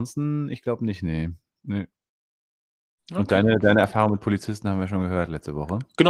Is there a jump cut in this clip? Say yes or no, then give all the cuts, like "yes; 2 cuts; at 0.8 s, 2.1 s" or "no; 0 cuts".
no; 0 cuts